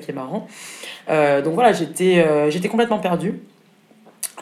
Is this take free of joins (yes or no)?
yes